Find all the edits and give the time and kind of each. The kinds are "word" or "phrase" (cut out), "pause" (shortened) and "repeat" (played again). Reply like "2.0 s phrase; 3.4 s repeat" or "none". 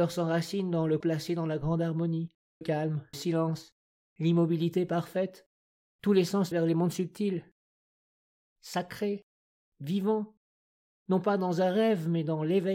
1.0 s word; 2.6 s word; 3.1 s word; 6.5 s word

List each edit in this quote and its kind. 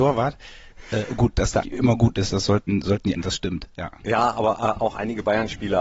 1.6 s word; 3.1 s phrase

